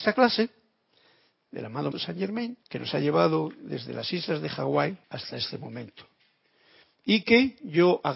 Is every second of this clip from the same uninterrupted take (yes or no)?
no